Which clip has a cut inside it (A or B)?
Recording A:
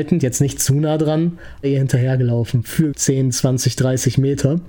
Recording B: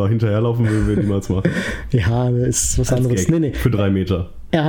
A